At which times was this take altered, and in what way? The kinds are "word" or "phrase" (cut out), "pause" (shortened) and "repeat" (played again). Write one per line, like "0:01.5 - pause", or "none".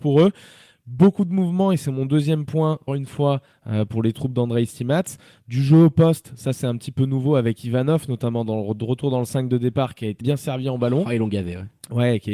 0:02.9 - word
0:10.2 - word

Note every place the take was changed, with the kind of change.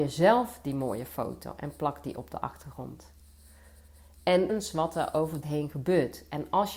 0:04.5 - word
0:05.4 - phrase

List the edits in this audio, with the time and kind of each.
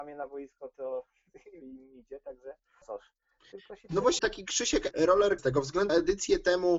0:01.6 - word
0:02.8 - word
0:04.2 - word
0:04.9 - word
0:05.4 - word
0:05.9 - word

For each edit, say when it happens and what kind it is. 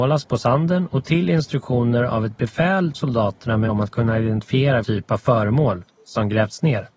0:02.9 - word
0:03.7 - word
0:04.8 - word

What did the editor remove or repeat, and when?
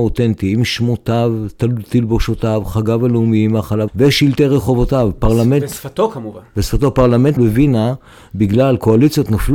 0:03.9 - word
0:07.4 - word

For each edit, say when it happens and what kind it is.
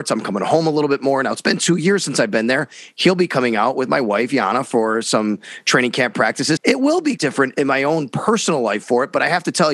0:06.6 - word
0:07.2 - word

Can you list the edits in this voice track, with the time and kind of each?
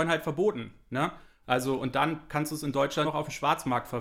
0:02.3 - word
0:03.0 - word

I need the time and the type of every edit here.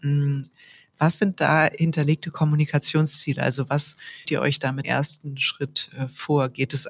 0:04.2 - word
0:04.8 - word

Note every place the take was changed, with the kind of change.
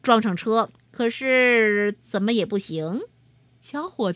0:03.1 - pause

